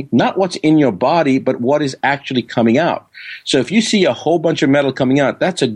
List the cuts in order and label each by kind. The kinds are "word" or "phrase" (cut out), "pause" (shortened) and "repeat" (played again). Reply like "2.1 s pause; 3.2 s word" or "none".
none